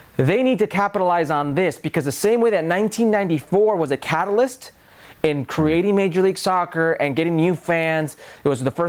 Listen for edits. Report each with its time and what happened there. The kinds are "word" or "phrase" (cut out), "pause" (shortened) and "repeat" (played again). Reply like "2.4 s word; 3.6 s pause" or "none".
none